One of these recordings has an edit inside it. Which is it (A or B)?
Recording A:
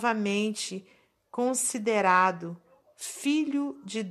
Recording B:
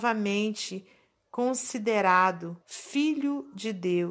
B